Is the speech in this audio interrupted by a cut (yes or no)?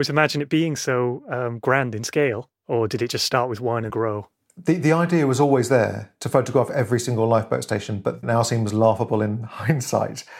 yes